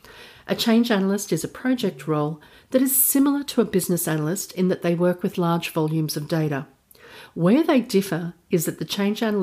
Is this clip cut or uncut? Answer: uncut